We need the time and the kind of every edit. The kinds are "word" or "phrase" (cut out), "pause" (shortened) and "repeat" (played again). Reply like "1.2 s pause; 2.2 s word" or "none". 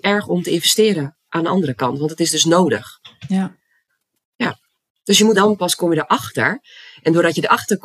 5.3 s phrase